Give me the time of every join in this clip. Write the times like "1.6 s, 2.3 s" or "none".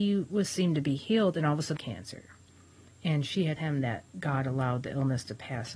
1.8 s, 3.6 s